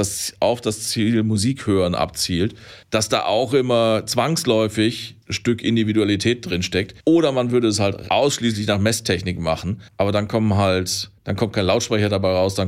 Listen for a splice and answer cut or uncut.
cut